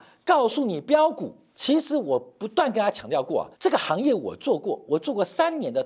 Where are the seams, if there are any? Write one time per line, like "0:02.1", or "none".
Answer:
0:01.5
0:03.5